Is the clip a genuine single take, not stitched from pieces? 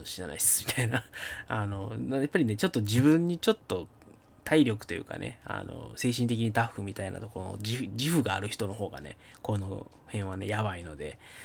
yes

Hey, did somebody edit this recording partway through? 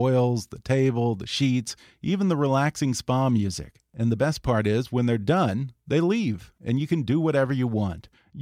no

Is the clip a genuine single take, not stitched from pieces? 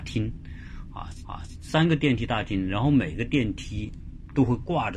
no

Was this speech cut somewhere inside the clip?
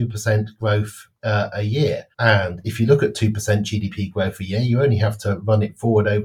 yes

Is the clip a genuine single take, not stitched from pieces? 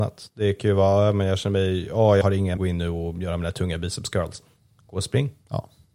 no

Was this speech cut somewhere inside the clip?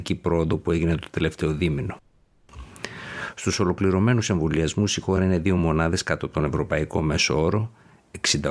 no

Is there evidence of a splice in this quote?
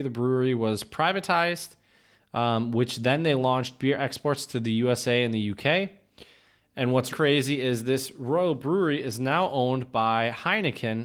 yes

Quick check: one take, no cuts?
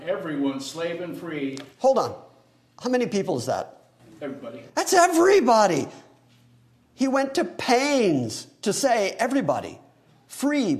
yes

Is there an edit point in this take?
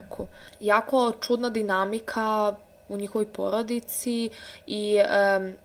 no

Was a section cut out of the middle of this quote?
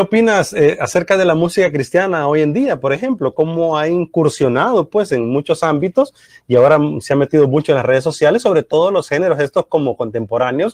no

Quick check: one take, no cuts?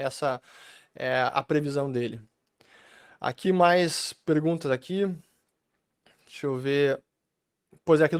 yes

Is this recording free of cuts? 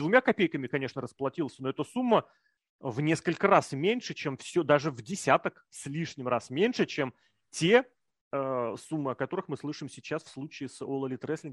yes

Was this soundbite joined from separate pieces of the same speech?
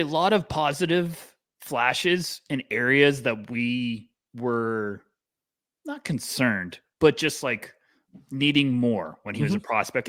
no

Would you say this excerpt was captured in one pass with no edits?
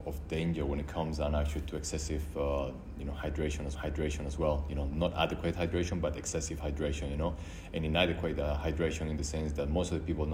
no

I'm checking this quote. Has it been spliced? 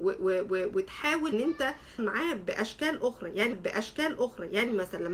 yes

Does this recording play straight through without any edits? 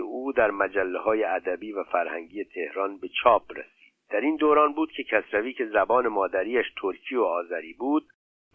yes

